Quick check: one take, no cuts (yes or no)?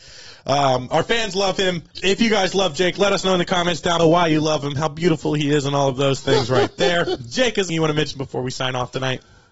no